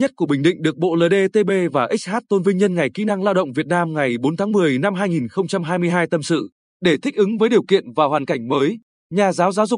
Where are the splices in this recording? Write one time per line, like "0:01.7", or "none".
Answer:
none